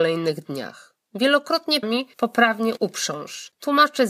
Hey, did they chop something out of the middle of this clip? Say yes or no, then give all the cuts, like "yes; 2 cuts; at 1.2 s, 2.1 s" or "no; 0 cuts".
yes; 2 cuts; at 1.8 s, 2.8 s